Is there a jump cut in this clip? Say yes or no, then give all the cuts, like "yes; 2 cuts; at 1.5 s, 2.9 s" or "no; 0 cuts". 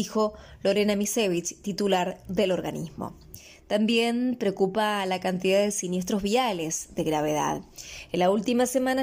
no; 0 cuts